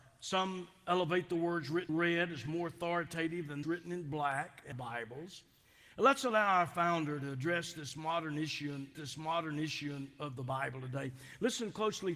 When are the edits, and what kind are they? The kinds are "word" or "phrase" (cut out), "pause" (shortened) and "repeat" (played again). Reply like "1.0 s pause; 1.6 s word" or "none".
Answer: 1.9 s word; 3.6 s word; 4.7 s word; 8.9 s repeat